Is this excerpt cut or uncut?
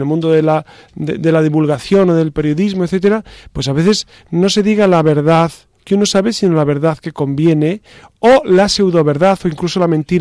uncut